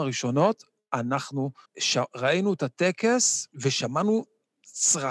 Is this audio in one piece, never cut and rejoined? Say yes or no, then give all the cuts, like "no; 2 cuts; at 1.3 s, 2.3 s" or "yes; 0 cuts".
no; 2 cuts; at 1.6 s, 3.5 s